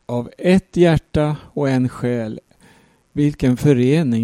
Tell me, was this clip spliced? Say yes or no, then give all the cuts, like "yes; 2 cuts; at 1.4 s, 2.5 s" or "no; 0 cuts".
no; 0 cuts